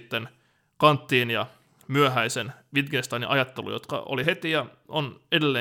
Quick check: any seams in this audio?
no; 0 cuts

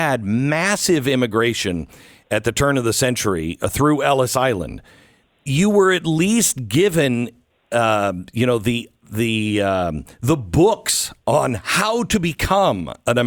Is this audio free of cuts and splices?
yes; 0 cuts

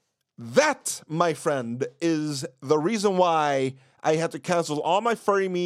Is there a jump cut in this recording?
no; 0 cuts

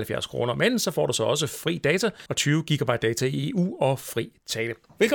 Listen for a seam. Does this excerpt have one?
yes; 1 cut; at 2.3 s

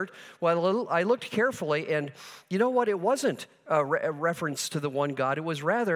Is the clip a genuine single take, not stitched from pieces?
yes; 0 cuts

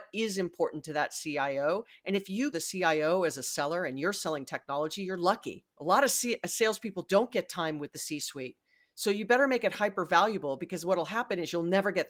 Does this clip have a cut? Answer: yes; 1 cut; at 2.5 s

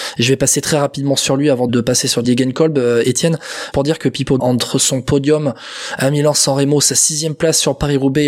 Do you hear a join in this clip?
yes; 4 cuts; at 1.7 s, 2.2 s, 3.7 s, 4.4 s

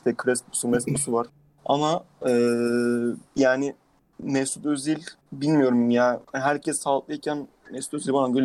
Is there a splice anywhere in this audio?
yes; 4 cuts; at 1.3 s, 3.3 s, 5.2 s, 6.2 s

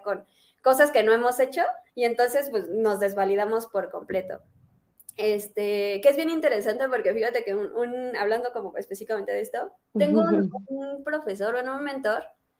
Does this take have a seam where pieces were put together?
yes; 1 cut; at 1.9 s

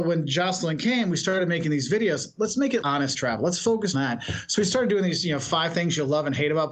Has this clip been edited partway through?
yes; 2 cuts; at 2.8 s, 3.9 s

